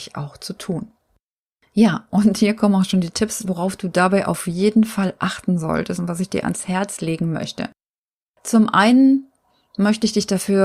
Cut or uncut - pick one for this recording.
uncut